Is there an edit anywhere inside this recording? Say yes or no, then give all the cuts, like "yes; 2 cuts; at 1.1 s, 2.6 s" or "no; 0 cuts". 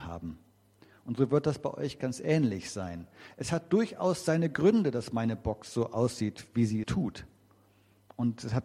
yes; 1 cut; at 6.8 s